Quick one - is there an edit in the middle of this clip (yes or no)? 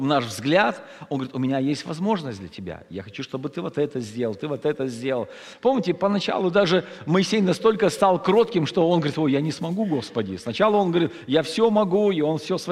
no